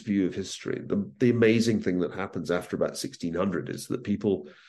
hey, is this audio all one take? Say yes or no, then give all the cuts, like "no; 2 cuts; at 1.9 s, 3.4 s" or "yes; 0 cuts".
yes; 0 cuts